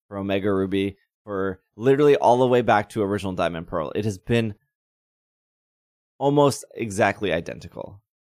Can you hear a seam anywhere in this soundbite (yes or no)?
no